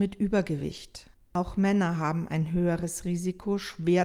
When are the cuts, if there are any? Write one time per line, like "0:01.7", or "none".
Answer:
0:01.1